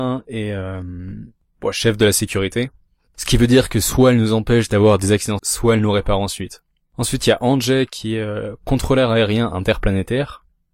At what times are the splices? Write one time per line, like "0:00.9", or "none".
0:05.4